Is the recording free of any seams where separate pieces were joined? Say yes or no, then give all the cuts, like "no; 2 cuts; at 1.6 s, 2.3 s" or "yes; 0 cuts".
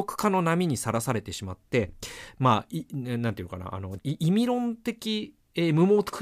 no; 1 cut; at 4.0 s